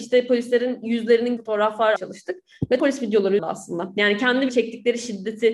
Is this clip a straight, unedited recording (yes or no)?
no